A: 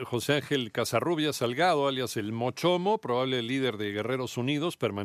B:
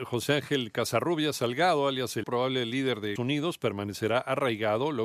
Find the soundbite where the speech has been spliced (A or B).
B